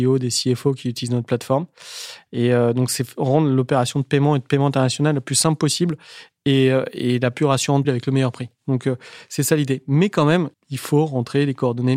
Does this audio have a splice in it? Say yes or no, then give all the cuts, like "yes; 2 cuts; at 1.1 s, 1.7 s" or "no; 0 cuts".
yes; 2 cuts; at 7.8 s, 10.5 s